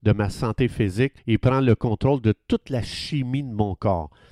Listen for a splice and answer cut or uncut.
cut